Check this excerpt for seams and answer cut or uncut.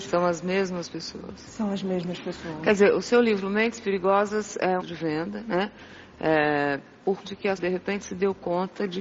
cut